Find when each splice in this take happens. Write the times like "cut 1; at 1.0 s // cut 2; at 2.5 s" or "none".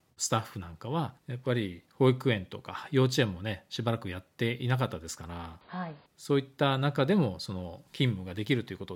cut 1; at 1.2 s // cut 2; at 1.9 s // cut 3; at 6.1 s // cut 4; at 7.9 s